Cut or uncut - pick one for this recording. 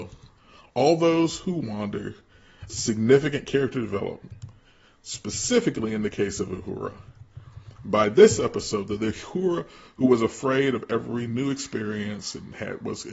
cut